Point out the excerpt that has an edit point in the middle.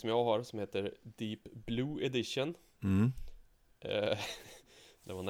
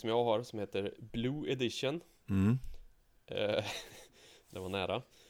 second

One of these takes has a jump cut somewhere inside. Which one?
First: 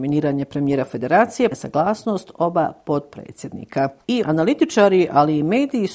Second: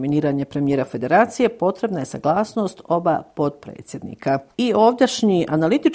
first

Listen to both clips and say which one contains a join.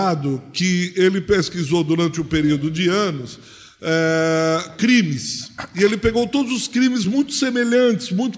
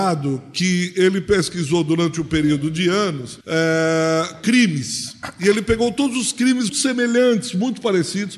second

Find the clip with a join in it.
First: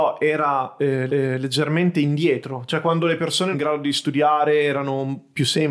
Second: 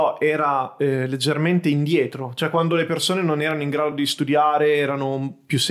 first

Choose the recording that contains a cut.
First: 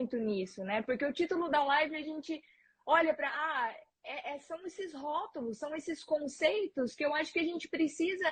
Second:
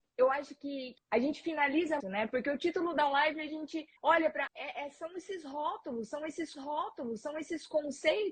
second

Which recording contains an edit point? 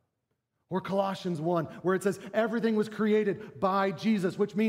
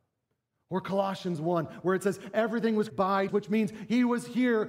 second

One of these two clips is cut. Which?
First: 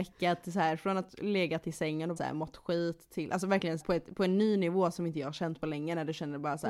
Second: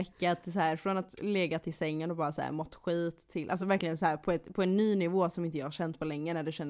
first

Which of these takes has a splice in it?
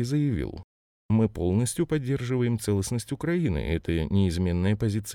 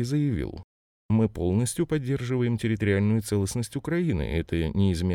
first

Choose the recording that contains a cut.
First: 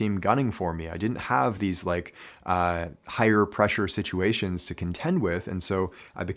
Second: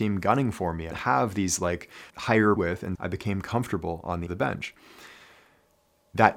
second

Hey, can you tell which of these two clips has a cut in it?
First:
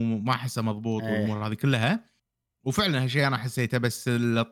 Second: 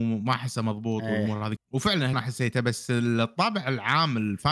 second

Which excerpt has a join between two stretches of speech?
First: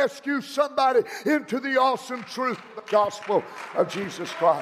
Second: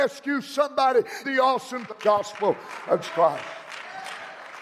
second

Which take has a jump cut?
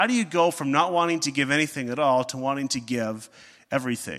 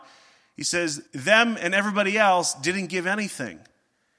second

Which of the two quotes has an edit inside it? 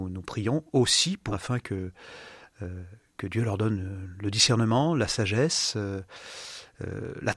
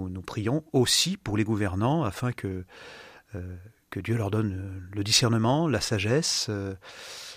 first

